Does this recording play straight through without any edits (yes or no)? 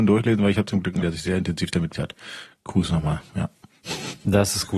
no